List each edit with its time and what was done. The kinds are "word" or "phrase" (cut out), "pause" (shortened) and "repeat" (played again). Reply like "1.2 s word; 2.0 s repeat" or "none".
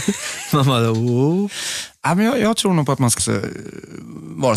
3.2 s word